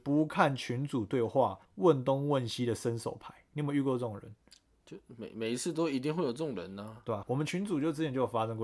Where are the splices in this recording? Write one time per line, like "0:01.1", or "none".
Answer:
0:01.6
0:07.2